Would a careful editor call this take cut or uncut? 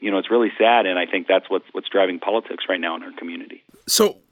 cut